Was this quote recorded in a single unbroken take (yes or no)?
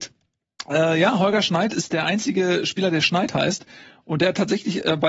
yes